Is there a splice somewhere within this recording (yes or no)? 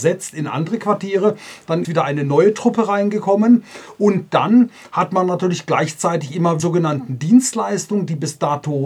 yes